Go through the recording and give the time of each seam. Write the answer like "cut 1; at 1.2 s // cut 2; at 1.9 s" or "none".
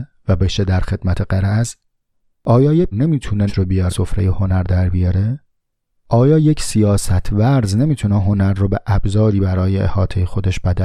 cut 1; at 2.9 s // cut 2; at 3.5 s // cut 3; at 3.9 s

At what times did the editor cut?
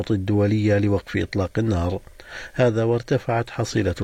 none

